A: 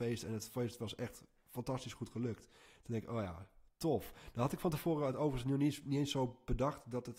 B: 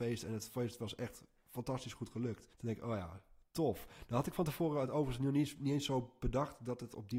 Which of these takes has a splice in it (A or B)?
B